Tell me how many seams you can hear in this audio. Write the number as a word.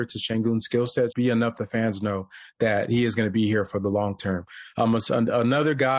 two